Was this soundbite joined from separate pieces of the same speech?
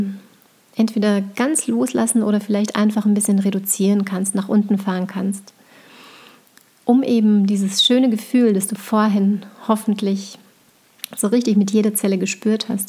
no; 0 cuts

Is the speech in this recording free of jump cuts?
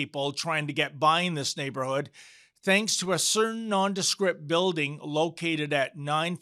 yes; 0 cuts

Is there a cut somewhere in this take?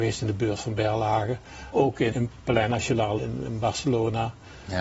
yes; 3 cuts; at 1.7 s, 2.1 s, 3.2 s

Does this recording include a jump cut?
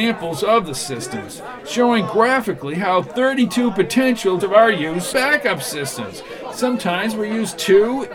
yes; 2 cuts; at 4.4 s, 5.1 s

